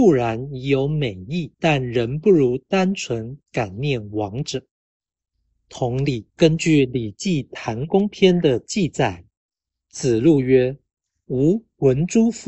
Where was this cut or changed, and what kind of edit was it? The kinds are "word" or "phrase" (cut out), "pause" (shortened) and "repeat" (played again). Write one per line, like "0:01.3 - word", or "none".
0:01.5 - pause
0:03.4 - pause
0:06.3 - pause